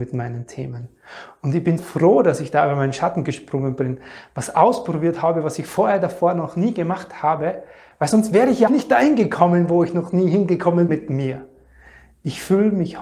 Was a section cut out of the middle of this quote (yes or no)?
yes